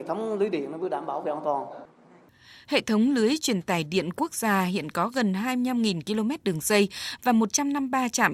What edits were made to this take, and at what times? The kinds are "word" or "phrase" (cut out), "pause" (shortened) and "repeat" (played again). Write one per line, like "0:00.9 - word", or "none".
none